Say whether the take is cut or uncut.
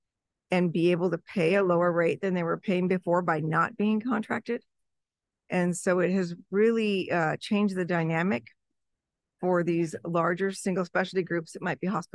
uncut